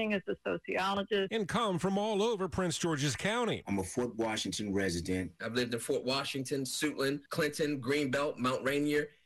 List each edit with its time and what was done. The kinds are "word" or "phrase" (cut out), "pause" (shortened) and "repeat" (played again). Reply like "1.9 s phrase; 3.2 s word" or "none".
7.3 s pause

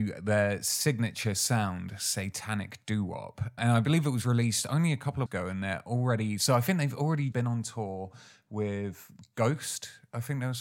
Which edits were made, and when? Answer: 3.6 s word; 5.3 s word; 7.3 s word

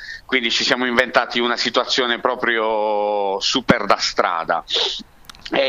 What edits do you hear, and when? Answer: none

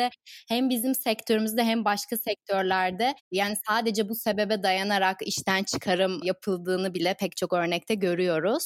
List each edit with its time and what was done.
3.2 s pause

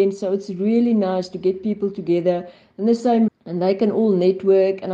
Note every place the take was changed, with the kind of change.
3.3 s word

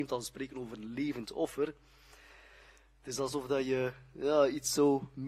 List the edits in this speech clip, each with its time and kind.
none

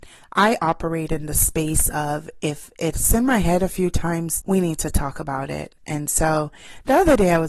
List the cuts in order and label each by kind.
4.4 s word

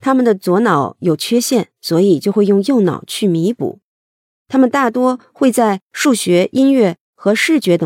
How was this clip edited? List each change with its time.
none

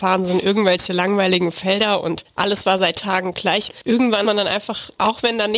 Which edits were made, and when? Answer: 4.2 s word

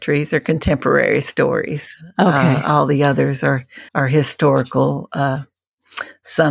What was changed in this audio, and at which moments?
3.9 s pause

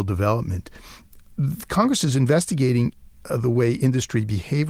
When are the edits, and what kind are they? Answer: none

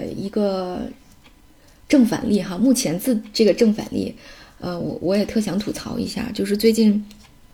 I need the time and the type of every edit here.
none

